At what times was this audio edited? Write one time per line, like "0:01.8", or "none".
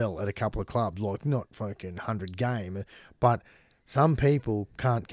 none

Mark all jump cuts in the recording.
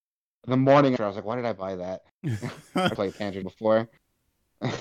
0:01.0
0:03.0
0:03.4

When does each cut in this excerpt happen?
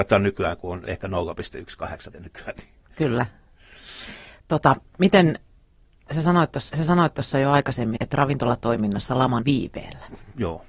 0:02.1
0:06.7
0:08.0
0:09.4

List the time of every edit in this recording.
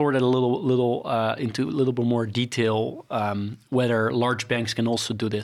none

